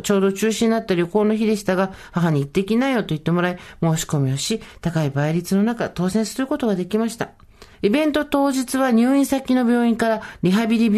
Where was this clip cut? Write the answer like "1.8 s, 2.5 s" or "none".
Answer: 7.7 s

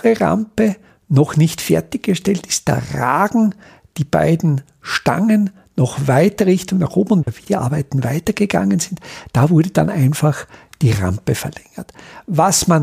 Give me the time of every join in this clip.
none

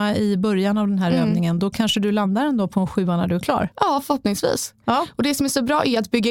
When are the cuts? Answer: none

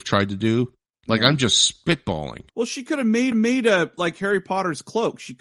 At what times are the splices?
2.5 s, 3.3 s

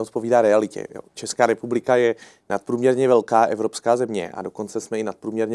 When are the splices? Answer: none

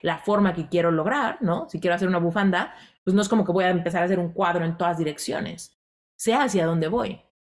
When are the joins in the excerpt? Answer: none

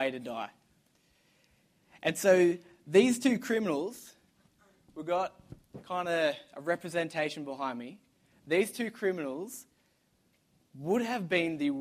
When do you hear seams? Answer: none

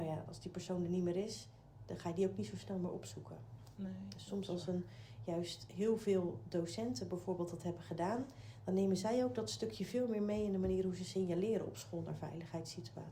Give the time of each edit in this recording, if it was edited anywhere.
none

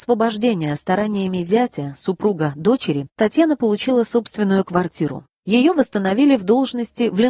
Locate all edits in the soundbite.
3.1 s

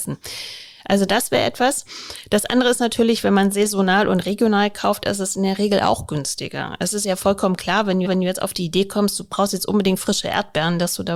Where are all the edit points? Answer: 8.0 s

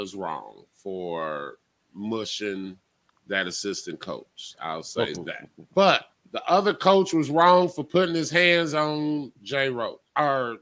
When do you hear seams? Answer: 2.9 s, 6.2 s

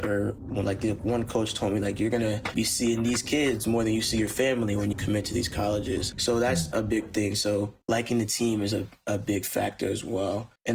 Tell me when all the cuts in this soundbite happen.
none

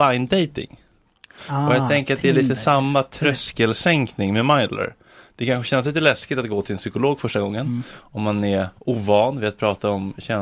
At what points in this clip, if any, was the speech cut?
8.8 s

